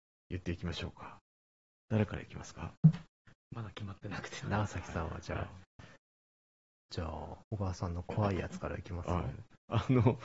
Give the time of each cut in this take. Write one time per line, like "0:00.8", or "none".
0:01.6
0:04.4
0:07.4

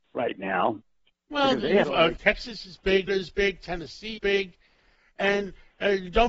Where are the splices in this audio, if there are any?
0:01.8
0:03.1
0:04.2

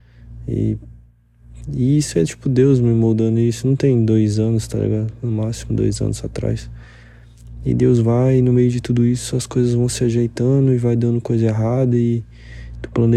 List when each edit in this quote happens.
none

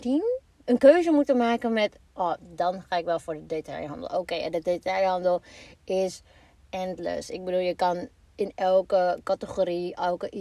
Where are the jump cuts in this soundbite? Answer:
none

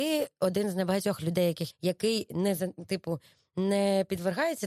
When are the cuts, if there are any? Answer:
0:01.7

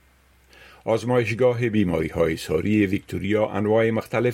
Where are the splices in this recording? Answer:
none

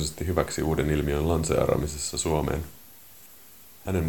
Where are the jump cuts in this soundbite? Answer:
none

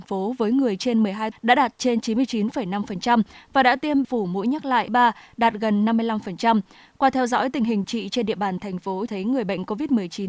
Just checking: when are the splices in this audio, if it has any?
0:01.3
0:04.0
0:04.9
0:07.8
0:09.1

